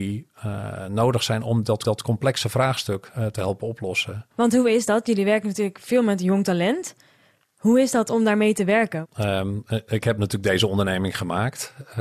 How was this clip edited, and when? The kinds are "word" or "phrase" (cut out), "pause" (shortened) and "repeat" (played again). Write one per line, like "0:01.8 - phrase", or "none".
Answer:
0:01.8 - repeat
0:04.3 - pause